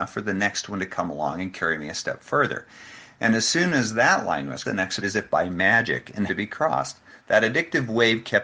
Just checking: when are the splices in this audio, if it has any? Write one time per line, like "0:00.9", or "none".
0:04.6
0:05.0
0:06.3